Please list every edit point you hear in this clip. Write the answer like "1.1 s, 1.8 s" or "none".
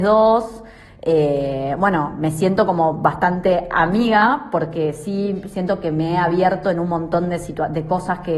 none